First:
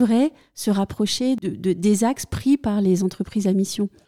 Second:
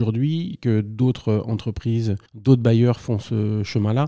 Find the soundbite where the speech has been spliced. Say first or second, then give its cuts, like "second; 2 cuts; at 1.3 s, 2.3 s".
second; 1 cut; at 2.3 s